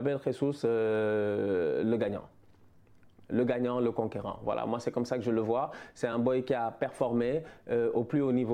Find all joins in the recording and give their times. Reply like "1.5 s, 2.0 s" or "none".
none